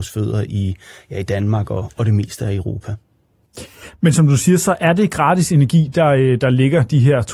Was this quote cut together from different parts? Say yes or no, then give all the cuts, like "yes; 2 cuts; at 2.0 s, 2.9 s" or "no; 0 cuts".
no; 0 cuts